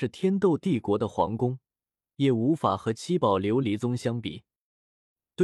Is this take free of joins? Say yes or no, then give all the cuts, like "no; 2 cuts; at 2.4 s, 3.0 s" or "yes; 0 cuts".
yes; 0 cuts